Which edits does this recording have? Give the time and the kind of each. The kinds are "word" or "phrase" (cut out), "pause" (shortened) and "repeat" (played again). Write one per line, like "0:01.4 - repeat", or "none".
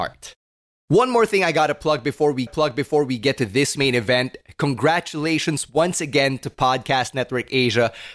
0:02.5 - repeat
0:03.8 - word